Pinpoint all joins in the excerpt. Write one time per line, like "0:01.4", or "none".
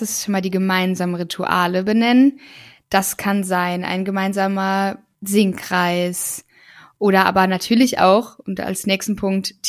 none